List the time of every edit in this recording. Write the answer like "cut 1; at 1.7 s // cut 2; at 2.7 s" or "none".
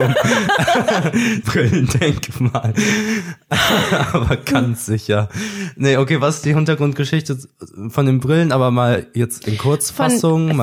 cut 1; at 1.4 s